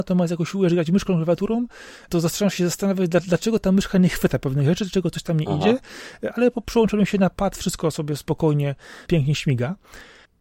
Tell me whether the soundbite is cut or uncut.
uncut